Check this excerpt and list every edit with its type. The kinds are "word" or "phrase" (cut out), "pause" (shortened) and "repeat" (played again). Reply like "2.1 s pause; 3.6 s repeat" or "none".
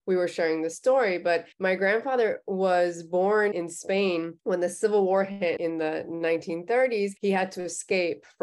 1.5 s pause; 3.5 s word; 4.4 s pause; 5.6 s word; 7.2 s pause